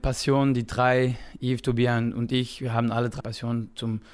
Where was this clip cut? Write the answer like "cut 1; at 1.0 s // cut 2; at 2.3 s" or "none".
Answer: cut 1; at 3.2 s